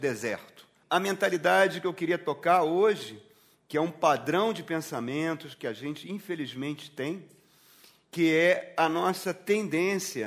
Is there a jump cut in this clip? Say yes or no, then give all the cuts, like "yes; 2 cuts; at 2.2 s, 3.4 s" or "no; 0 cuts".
no; 0 cuts